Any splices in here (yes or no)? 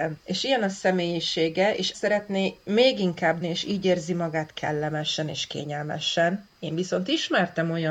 yes